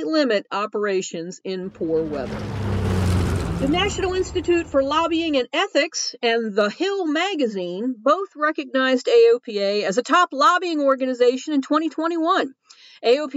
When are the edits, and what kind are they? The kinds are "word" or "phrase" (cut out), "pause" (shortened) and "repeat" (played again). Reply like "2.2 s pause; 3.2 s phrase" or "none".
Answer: none